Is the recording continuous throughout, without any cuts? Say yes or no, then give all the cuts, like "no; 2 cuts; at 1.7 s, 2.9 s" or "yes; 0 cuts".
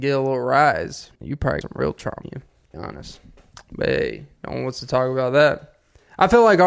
no; 5 cuts; at 1.2 s, 1.6 s, 2.2 s, 2.7 s, 4.4 s